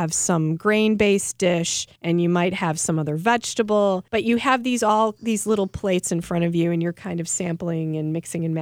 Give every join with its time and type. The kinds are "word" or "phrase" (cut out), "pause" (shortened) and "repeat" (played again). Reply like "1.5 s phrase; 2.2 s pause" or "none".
2.0 s pause; 4.1 s pause